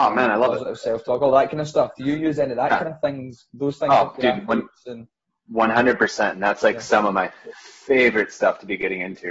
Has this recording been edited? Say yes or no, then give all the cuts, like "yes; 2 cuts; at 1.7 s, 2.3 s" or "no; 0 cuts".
no; 0 cuts